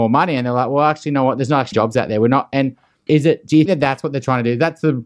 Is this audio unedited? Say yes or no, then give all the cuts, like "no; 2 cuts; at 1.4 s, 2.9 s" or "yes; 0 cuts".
no; 3 cuts; at 1.7 s, 3.1 s, 3.7 s